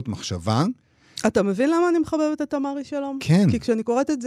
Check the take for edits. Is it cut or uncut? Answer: uncut